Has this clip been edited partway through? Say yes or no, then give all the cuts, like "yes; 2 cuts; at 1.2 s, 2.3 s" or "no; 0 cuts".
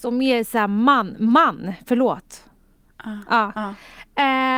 no; 0 cuts